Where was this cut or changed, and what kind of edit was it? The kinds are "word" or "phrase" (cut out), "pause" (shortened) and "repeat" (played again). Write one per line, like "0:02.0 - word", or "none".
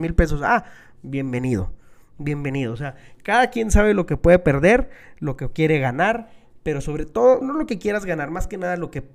0:07.4 - word

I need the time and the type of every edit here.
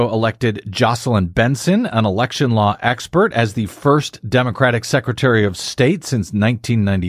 none

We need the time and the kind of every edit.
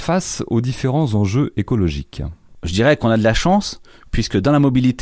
none

